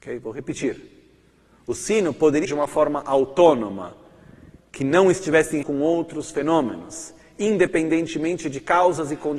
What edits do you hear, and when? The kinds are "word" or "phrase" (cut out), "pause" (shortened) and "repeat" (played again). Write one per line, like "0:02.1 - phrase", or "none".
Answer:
0:02.4 - word
0:05.6 - word